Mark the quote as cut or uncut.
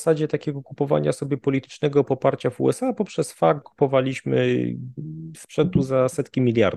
cut